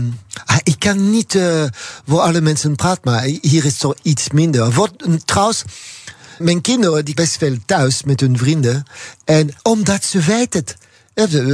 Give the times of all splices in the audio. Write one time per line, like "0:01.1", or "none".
0:06.4
0:07.2
0:09.6